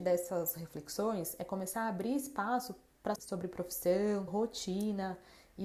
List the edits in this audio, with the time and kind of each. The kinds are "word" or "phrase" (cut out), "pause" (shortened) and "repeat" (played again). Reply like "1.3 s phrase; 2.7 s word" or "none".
3.2 s phrase; 4.3 s word